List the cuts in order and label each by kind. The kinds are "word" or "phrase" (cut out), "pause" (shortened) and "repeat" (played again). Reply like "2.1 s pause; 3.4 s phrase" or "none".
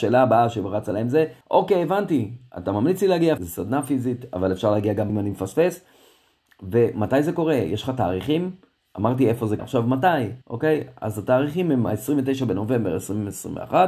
1.4 s pause; 3.4 s word; 5.1 s word; 8.8 s pause; 9.6 s word; 10.4 s pause